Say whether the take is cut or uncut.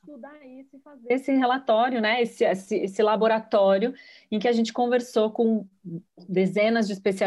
uncut